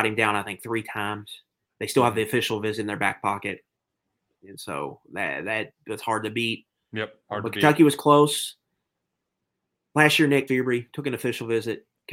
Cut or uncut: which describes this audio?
cut